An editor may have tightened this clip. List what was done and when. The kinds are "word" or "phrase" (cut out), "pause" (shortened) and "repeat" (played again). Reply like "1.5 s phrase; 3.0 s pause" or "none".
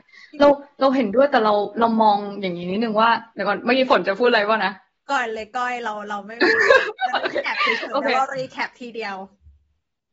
3.3 s pause; 5.0 s pause

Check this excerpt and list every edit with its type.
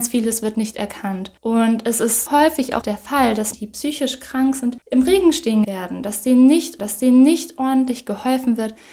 1.4 s pause; 2.3 s word; 2.8 s word; 3.5 s word; 4.8 s pause; 5.6 s word; 6.8 s repeat

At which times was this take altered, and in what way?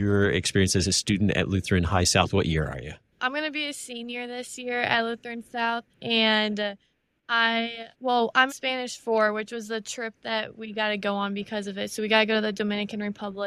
5.9 s pause; 7.9 s pause; 8.5 s word

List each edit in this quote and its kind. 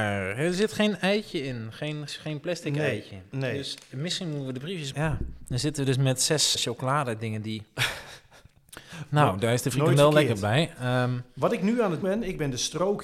2.1 s word; 4.9 s word; 6.5 s word; 12.0 s word

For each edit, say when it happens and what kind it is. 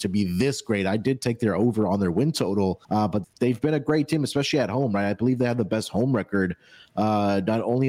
2.8 s pause; 3.2 s word

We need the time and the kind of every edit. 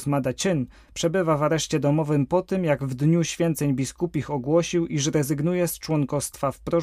none

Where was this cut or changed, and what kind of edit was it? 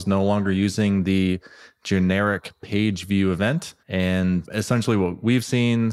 3.8 s pause

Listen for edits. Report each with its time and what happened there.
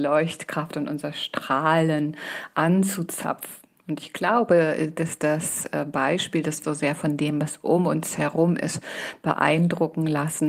6.6 s phrase

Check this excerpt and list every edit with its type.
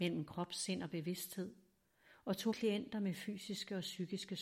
2.5 s word

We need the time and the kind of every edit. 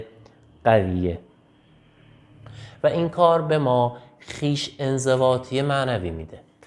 none

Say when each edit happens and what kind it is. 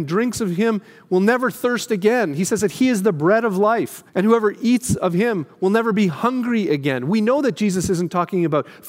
4.1 s pause

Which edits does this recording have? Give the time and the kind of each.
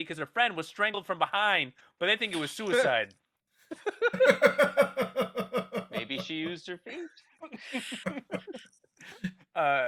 none

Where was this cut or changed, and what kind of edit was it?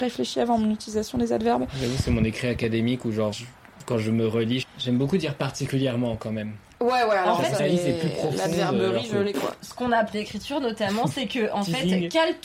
3.3 s word; 4.6 s word; 7.6 s word; 10.1 s phrase

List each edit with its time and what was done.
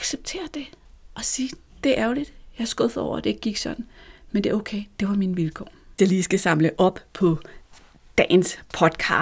6.0 s word

